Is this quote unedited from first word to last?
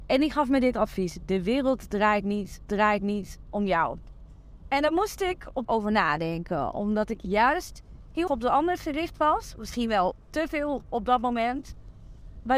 no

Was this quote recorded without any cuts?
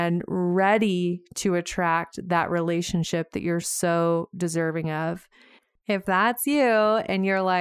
yes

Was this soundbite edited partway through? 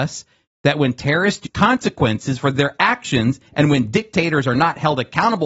yes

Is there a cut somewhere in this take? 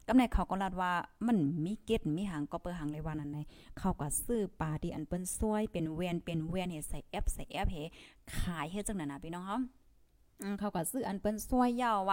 no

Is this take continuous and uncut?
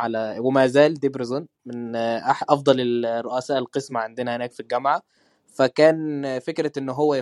yes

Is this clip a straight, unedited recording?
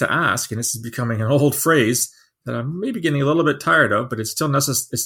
yes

